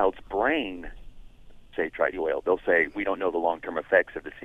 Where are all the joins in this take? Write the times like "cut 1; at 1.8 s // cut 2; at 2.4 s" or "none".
cut 1; at 1.7 s // cut 2; at 2.1 s

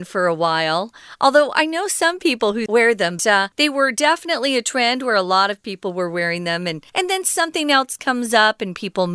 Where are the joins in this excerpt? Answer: cut 1; at 2.7 s // cut 2; at 3.2 s // cut 3; at 3.5 s // cut 4; at 6.9 s

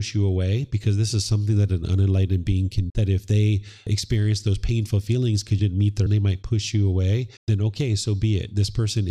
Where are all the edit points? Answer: cut 1; at 2.9 s // cut 2; at 5.6 s // cut 3; at 6.1 s // cut 4; at 7.4 s

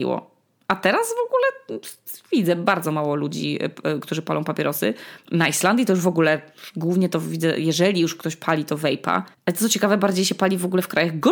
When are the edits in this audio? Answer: cut 1; at 9.3 s

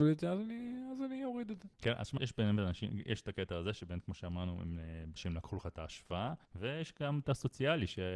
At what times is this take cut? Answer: cut 1; at 1.7 s // cut 2; at 2.2 s // cut 3; at 5.2 s // cut 4; at 6.5 s // cut 5; at 7.2 s

